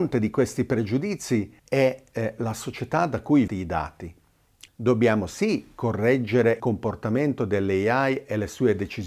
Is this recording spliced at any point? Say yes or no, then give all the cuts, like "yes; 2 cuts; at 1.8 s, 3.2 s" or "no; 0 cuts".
yes; 4 cuts; at 1.6 s, 3.5 s, 4.7 s, 6.6 s